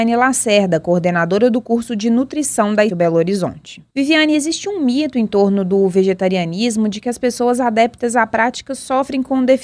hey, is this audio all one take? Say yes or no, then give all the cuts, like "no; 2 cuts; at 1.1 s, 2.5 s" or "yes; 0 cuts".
no; 1 cut; at 2.9 s